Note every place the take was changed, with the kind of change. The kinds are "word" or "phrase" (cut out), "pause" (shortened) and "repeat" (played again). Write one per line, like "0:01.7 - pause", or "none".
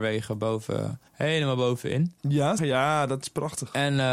0:01.1 - pause
0:02.6 - word